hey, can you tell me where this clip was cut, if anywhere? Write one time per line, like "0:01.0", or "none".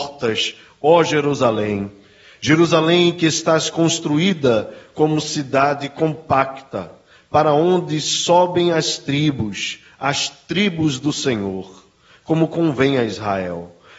none

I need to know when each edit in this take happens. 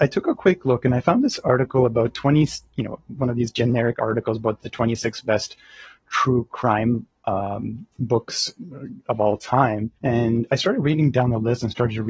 0:07.9
0:10.0

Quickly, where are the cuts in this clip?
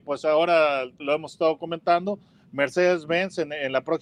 0:01.0

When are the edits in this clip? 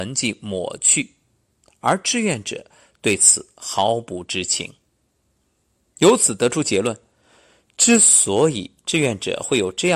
none

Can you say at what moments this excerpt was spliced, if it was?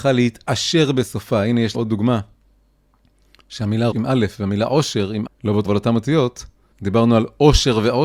0:01.7
0:03.9
0:05.3
0:05.6
0:06.7

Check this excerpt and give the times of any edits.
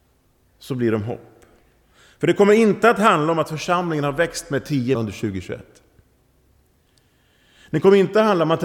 0:04.9

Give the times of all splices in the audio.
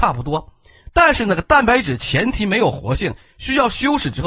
none

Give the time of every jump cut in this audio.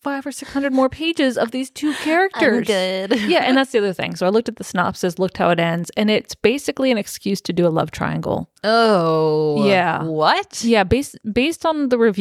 0:08.6

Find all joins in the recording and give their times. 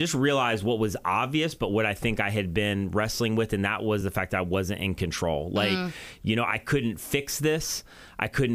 none

